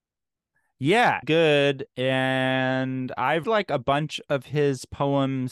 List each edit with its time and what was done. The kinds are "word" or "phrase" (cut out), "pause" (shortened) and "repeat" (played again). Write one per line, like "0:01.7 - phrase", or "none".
0:01.2 - phrase
0:01.9 - pause
0:03.4 - word